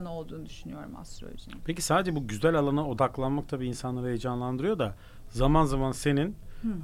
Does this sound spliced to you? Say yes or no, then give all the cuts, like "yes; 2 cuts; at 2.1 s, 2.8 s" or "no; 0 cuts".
no; 0 cuts